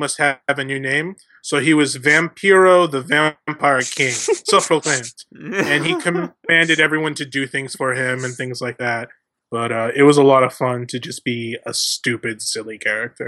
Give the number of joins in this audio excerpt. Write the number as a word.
zero